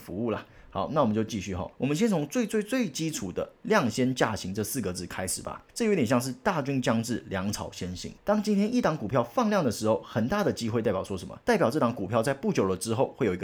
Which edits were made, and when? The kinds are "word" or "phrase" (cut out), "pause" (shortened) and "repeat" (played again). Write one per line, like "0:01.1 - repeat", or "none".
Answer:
0:01.7 - pause
0:05.7 - pause
0:08.2 - pause
0:11.4 - pause